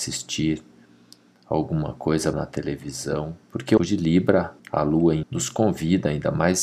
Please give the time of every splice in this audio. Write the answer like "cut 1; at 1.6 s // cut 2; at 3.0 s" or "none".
cut 1; at 2.3 s // cut 2; at 3.4 s // cut 3; at 3.8 s // cut 4; at 4.6 s // cut 5; at 5.2 s